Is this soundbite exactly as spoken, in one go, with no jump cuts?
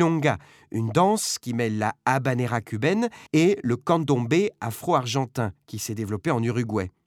no; 1 cut; at 3.3 s

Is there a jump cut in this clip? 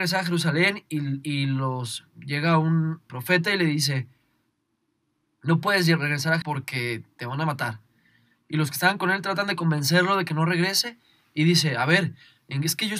yes; 2 cuts; at 3.1 s, 6.4 s

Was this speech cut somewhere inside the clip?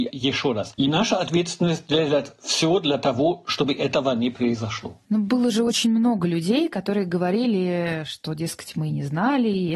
no; 0 cuts

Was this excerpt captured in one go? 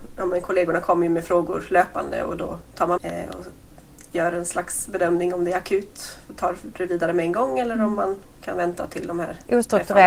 no; 1 cut; at 3.0 s

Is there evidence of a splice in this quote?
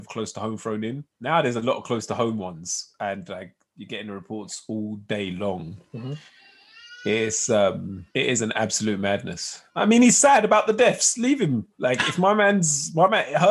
yes; 3 cuts; at 1.1 s, 8.1 s, 9.7 s

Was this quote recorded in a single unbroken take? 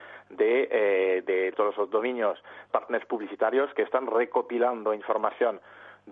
no; 2 cuts; at 1.5 s, 2.7 s

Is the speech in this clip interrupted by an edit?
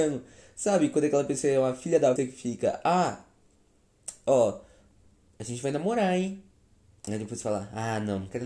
yes; 1 cut; at 2.2 s

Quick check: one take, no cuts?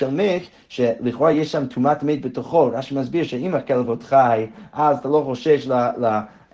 yes; 0 cuts

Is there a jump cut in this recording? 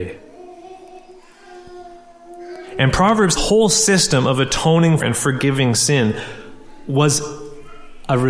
yes; 2 cuts; at 3.4 s, 5.0 s

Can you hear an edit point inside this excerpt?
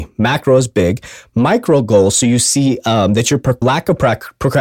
yes; 1 cut; at 3.6 s

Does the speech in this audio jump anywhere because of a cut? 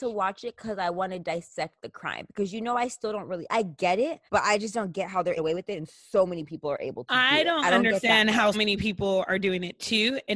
yes; 3 cuts; at 4.3 s, 5.4 s, 8.5 s

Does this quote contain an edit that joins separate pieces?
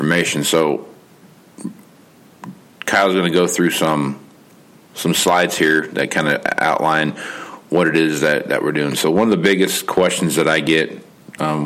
no; 0 cuts

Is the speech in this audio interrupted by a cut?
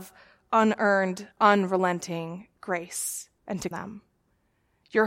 yes; 3 cuts; at 1.3 s, 3.4 s, 3.7 s

